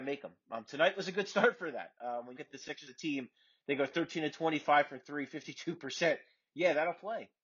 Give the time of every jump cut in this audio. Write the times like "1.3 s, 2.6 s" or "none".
2.4 s, 2.9 s